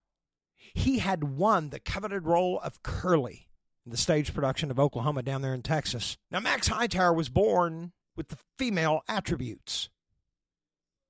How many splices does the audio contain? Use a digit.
4